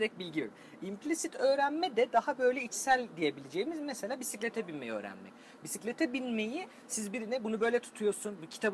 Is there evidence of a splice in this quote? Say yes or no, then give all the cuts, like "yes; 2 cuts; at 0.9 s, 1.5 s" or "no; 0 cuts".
no; 0 cuts